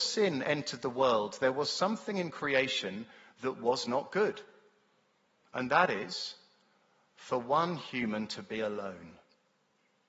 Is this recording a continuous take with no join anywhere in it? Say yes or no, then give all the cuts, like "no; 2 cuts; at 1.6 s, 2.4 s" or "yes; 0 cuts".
yes; 0 cuts